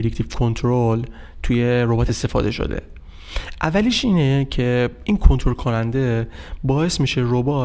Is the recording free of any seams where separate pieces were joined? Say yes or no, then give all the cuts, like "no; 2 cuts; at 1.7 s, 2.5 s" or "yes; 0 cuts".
no; 1 cut; at 2.1 s